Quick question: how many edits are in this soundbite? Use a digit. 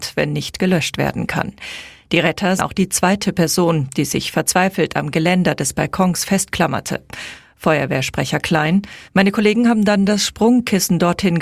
2